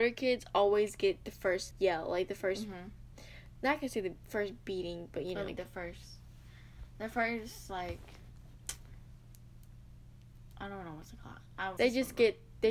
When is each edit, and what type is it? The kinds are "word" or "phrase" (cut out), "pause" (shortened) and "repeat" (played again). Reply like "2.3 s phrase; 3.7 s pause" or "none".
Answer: 1.7 s word; 5.5 s word; 11.8 s word